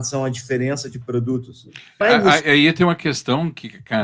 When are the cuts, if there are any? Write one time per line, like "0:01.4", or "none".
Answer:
0:02.0